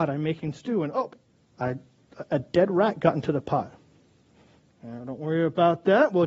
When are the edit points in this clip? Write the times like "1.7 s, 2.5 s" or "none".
1.3 s